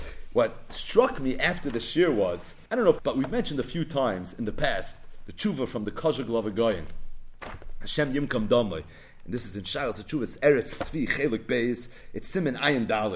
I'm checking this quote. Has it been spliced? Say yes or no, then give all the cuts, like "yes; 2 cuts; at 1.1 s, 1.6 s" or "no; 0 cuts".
yes; 2 cuts; at 2.7 s, 3.0 s